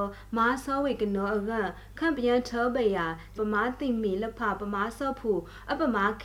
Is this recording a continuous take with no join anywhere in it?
no; 1 cut; at 3.4 s

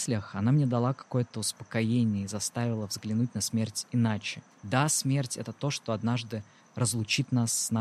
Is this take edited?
yes; 1 cut; at 4.5 s

